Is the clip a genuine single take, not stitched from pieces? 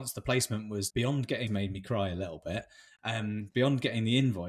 no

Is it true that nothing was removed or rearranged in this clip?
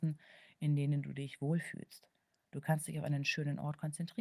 yes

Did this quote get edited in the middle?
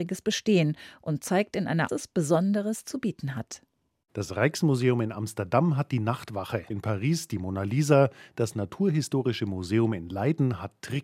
yes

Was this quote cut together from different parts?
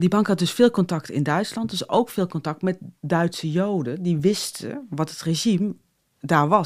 no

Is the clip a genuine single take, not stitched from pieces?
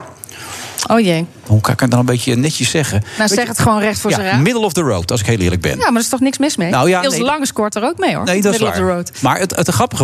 yes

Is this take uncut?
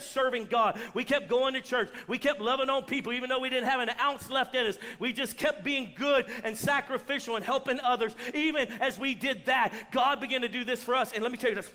yes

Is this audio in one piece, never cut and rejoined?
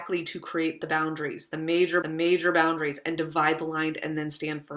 no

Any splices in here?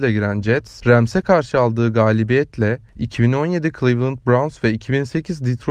no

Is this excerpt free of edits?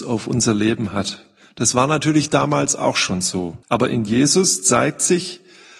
no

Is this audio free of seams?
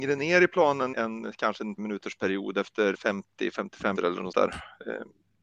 no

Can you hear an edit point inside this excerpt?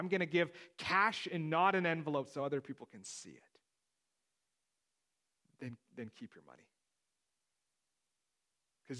no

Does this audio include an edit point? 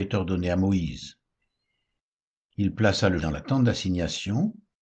yes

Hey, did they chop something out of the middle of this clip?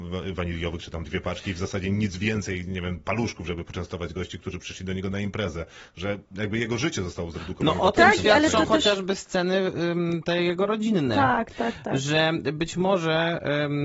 no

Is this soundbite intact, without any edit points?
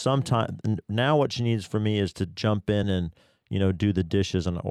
yes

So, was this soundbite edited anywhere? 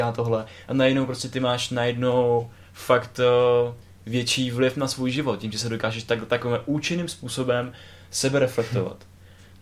no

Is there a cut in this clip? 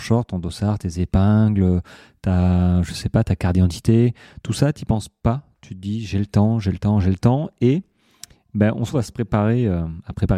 yes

